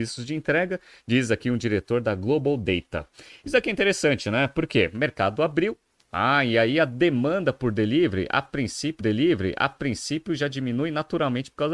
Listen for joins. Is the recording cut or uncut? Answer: cut